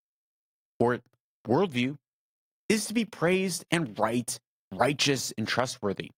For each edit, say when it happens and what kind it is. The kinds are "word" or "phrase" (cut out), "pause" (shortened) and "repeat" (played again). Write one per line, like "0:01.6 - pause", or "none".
none